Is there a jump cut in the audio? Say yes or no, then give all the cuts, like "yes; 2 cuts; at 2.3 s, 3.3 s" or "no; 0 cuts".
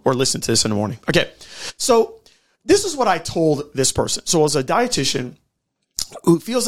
no; 0 cuts